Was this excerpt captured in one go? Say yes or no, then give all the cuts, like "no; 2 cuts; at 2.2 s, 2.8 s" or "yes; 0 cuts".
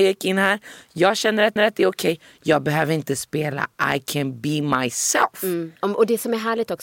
no; 2 cuts; at 1.6 s, 5.8 s